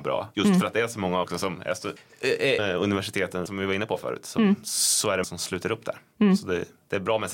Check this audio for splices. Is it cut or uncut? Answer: cut